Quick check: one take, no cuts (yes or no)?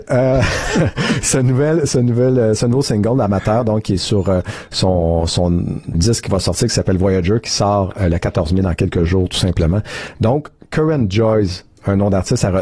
no